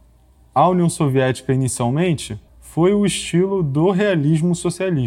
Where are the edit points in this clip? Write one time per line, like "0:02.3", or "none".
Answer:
0:02.5